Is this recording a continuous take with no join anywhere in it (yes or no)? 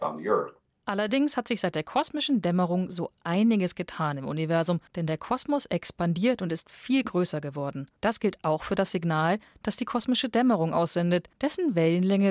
no